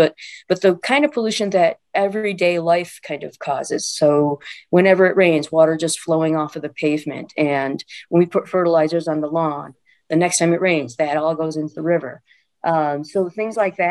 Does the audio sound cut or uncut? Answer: uncut